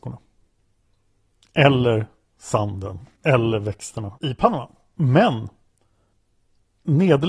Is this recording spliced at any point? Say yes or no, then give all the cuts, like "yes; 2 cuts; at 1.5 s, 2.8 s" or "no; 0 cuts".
yes; 2 cuts; at 3.2 s, 4.2 s